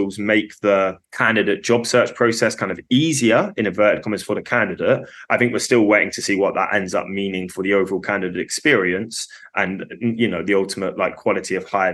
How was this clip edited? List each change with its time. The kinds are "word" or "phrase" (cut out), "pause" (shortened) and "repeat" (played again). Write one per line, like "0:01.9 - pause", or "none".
0:01.0 - pause